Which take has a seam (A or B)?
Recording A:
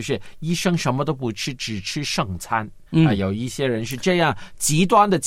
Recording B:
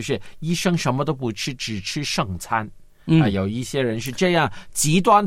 A